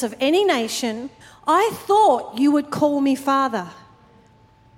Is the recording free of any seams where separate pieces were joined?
no; 1 cut; at 1.2 s

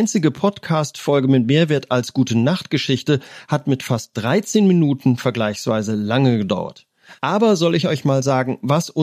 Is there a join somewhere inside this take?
no; 0 cuts

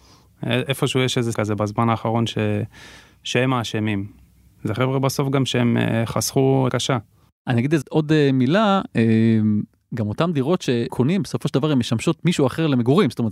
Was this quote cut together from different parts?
yes; 4 cuts; at 1.3 s, 6.7 s, 7.8 s, 10.9 s

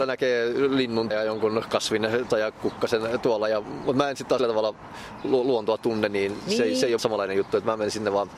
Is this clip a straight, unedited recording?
no; 4 cuts; at 1.1 s, 2.3 s, 4.4 s, 7.0 s

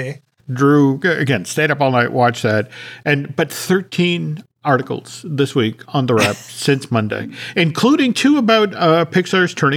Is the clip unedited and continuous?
yes; 0 cuts

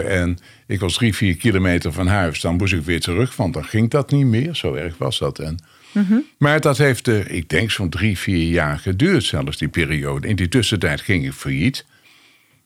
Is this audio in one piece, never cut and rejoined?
yes; 0 cuts

